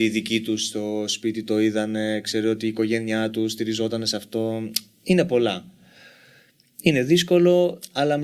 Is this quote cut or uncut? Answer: uncut